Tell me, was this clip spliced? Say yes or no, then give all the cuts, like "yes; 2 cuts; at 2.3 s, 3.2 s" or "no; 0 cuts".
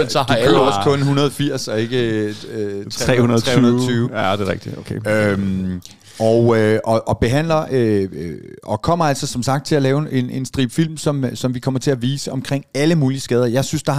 no; 0 cuts